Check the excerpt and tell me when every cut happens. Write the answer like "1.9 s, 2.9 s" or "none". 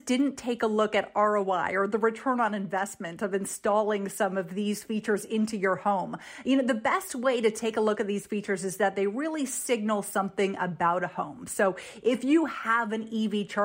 none

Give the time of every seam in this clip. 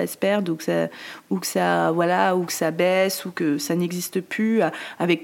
none

